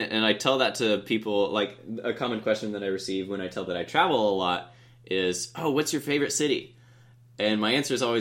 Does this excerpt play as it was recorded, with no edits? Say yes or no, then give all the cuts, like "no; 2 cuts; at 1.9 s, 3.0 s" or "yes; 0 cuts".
no; 1 cut; at 3.7 s